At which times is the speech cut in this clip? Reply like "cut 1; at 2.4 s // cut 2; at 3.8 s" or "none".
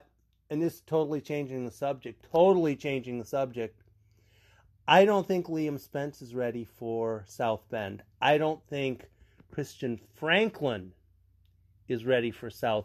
none